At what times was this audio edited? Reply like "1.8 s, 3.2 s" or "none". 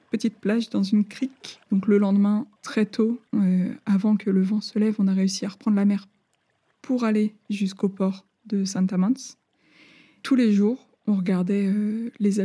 1.6 s, 2.6 s, 3.3 s